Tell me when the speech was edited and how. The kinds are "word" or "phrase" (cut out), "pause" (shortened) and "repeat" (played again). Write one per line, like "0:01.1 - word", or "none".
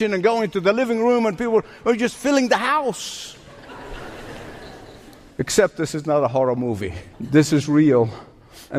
0:07.1 - pause